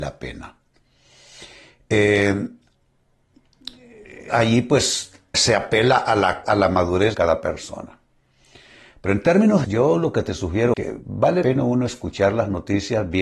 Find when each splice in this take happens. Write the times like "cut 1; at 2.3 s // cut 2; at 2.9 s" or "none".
cut 1; at 4.3 s // cut 2; at 5.3 s // cut 3; at 6.4 s // cut 4; at 7.1 s // cut 5; at 9.6 s // cut 6; at 10.7 s // cut 7; at 11.4 s

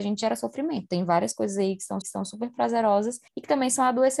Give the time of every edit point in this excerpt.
cut 1; at 2.0 s // cut 2; at 3.3 s

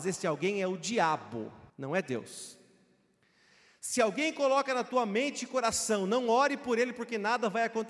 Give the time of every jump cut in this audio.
cut 1; at 1.7 s

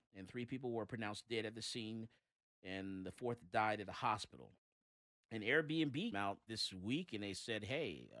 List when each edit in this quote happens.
cut 1; at 6.1 s // cut 2; at 6.5 s

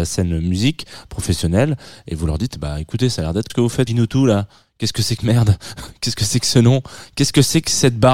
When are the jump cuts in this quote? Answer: cut 1; at 3.5 s // cut 2; at 3.9 s // cut 3; at 5.2 s

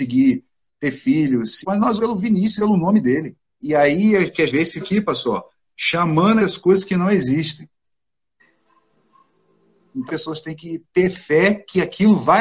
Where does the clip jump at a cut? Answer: cut 1; at 1.6 s // cut 2; at 2.0 s // cut 3; at 2.6 s // cut 4; at 3.6 s // cut 5; at 4.5 s // cut 6; at 4.8 s // cut 7; at 6.4 s // cut 8; at 10.1 s

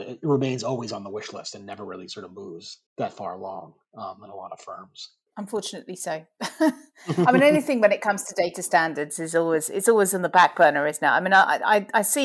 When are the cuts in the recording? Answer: cut 1; at 2.9 s

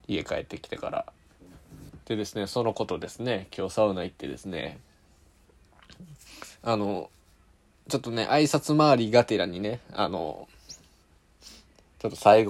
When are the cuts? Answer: cut 1; at 2.0 s

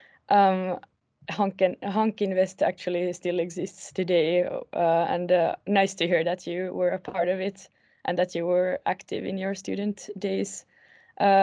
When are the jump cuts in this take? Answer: none

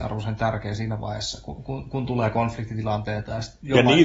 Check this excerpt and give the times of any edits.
none

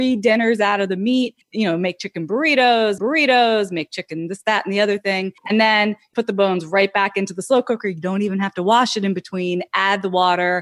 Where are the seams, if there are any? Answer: cut 1; at 1.4 s // cut 2; at 3.0 s // cut 3; at 5.4 s // cut 4; at 6.1 s

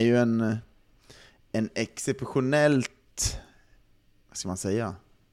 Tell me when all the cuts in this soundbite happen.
none

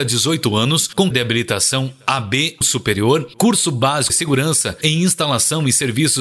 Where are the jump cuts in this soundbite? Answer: cut 1; at 1.1 s // cut 2; at 2.6 s // cut 3; at 4.1 s

